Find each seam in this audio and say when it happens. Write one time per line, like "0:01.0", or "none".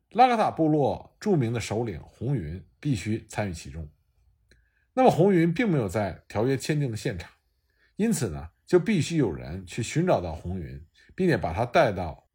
none